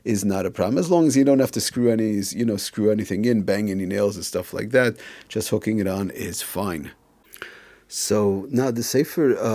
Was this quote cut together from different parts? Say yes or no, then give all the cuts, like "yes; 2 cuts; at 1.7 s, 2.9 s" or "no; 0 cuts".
no; 0 cuts